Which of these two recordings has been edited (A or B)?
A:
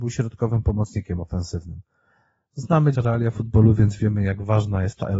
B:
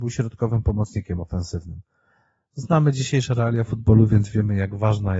A